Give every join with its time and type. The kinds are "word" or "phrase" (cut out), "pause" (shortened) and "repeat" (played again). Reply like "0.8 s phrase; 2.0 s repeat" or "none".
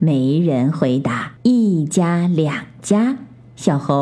1.4 s pause